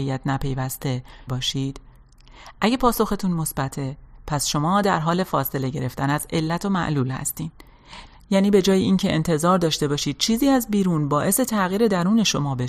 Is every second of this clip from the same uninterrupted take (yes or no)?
no